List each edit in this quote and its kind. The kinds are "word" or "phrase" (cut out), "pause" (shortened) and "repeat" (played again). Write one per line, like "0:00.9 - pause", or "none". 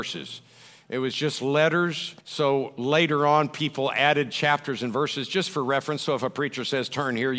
0:02.2 - pause